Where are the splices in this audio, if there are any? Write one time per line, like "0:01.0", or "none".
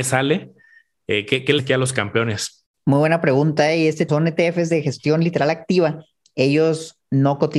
0:01.6
0:04.1

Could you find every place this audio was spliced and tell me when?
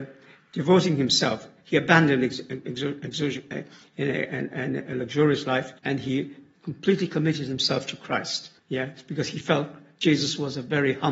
0:05.8
0:08.6

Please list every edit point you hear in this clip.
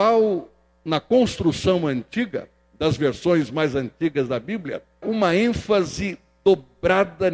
0:05.0

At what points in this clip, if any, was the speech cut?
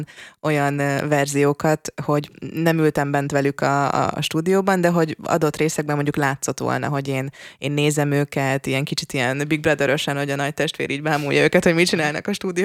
none

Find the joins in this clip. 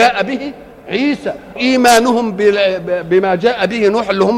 0:01.6

